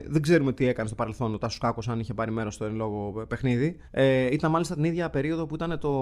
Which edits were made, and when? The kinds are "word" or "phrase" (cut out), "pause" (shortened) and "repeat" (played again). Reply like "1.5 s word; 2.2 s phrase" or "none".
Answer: 3.8 s pause